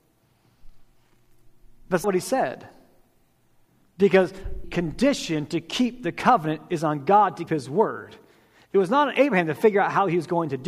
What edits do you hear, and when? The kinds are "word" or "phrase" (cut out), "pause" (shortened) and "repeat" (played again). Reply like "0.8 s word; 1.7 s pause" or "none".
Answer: 2.0 s word; 4.6 s word; 7.5 s word